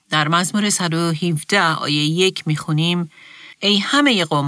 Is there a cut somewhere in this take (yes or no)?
yes